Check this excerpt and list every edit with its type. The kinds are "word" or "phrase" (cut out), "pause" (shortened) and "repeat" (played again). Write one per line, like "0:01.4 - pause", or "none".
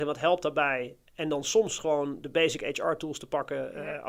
none